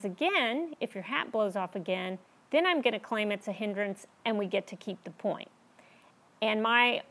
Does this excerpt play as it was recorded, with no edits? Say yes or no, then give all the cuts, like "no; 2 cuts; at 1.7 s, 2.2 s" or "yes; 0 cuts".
yes; 0 cuts